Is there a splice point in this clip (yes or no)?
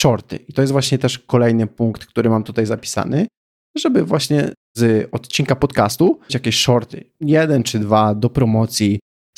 yes